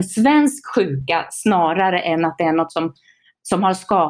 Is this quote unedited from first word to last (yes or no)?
yes